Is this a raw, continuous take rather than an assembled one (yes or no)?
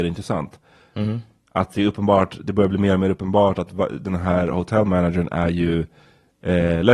yes